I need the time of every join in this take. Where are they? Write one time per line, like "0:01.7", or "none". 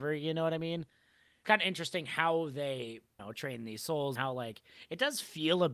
0:01.4
0:03.2
0:04.2

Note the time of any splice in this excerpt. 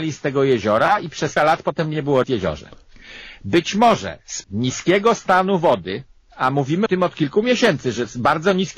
0:01.4
0:02.2
0:04.4
0:06.9

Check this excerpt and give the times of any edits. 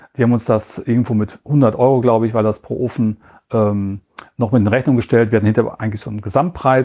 none

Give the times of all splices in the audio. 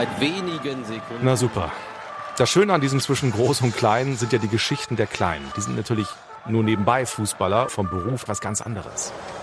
0:03.0
0:07.7
0:08.3

